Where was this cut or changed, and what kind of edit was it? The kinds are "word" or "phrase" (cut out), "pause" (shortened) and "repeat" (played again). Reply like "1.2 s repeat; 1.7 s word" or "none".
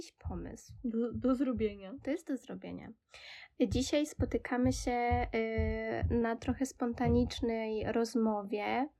none